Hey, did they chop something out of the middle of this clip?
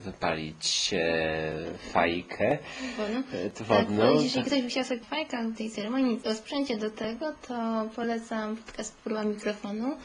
yes; 3 cuts; at 5.0 s, 5.6 s, 6.2 s

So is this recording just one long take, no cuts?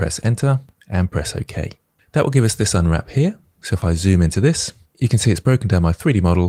yes; 0 cuts

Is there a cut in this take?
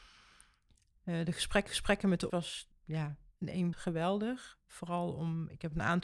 yes; 4 cuts; at 1.7 s, 2.3 s, 2.7 s, 3.7 s

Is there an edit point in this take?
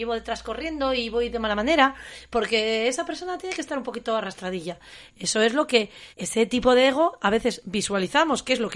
yes; 1 cut; at 6.1 s

